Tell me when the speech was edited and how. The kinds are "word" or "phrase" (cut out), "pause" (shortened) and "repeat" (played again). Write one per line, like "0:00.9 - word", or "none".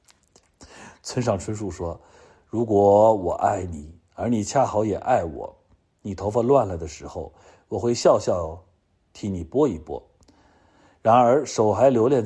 none